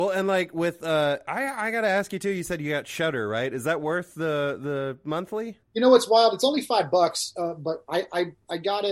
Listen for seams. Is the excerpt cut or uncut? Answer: cut